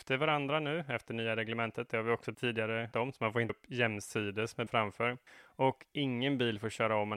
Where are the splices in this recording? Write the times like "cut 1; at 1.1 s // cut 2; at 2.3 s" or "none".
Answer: cut 1; at 2.3 s // cut 2; at 2.9 s // cut 3; at 3.5 s // cut 4; at 4.7 s // cut 5; at 5.3 s